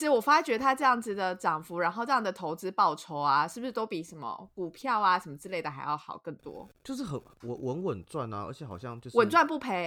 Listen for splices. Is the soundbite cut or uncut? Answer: uncut